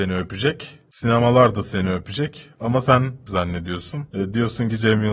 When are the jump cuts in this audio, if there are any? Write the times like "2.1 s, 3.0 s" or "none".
3.3 s